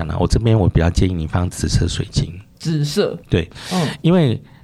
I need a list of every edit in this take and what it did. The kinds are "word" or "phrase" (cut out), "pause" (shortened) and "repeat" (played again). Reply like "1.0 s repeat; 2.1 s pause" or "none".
3.2 s pause

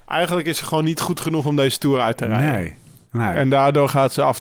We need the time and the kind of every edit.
none

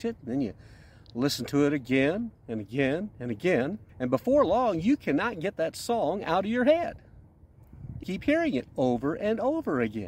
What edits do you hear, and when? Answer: 3.9 s pause; 8.0 s word

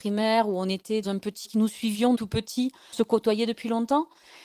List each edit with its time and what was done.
1.0 s word; 1.4 s word; 2.1 s word; 2.9 s word

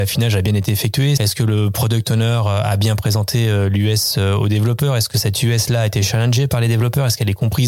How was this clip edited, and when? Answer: 1.2 s word

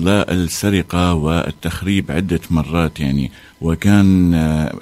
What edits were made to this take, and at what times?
none

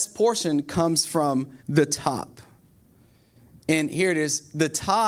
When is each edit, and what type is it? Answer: 1.6 s pause

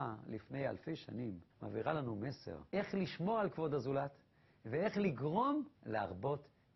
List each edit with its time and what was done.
1.5 s pause; 2.7 s pause; 5.7 s pause

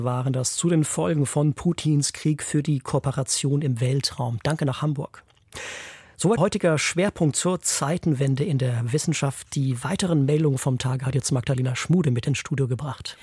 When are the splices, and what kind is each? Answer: 6.4 s word

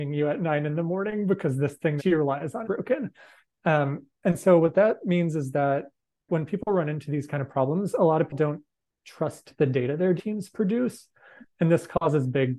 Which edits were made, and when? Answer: 2.0 s word; 2.6 s word; 4.1 s pause; 6.3 s word; 8.3 s word; 10.2 s word

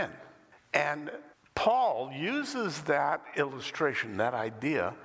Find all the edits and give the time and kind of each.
1.3 s pause

